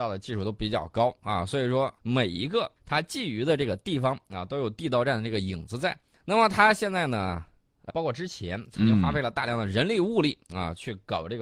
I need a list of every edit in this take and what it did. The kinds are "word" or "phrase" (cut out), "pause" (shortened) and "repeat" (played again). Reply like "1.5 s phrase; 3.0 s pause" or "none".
2.0 s pause; 2.8 s pause; 6.1 s pause; 7.9 s word

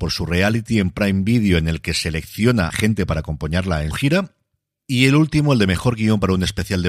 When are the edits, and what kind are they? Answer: 2.7 s word; 3.9 s word

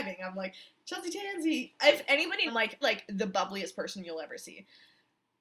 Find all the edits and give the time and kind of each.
2.5 s phrase; 2.8 s word

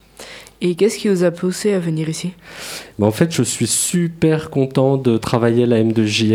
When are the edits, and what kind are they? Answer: none

